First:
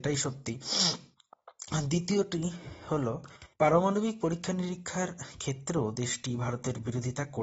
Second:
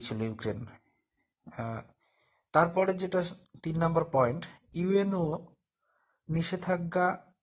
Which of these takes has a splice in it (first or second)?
first